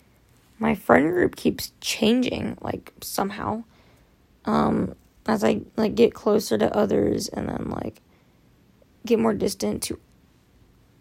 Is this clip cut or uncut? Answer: uncut